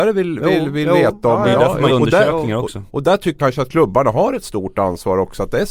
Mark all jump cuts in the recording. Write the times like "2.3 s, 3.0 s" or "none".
1.9 s, 2.9 s, 3.4 s